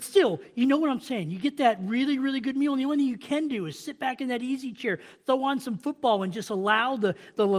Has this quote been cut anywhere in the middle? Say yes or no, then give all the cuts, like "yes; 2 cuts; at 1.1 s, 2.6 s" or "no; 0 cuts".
no; 0 cuts